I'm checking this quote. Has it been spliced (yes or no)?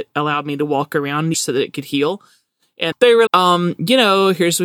yes